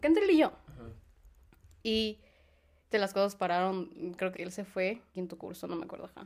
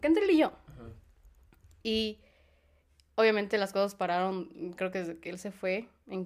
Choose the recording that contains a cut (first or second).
first